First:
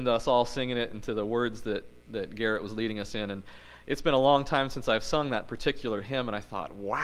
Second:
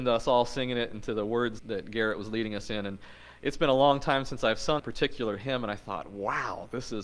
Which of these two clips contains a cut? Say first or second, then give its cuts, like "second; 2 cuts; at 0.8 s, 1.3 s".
second; 2 cuts; at 1.6 s, 4.8 s